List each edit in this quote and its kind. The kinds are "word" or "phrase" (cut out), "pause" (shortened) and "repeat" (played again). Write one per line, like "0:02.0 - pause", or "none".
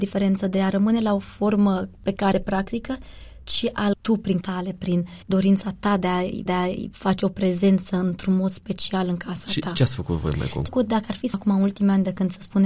0:02.3 - phrase
0:03.4 - pause
0:03.9 - word
0:04.4 - word
0:05.2 - pause
0:06.5 - repeat
0:10.7 - word
0:11.3 - word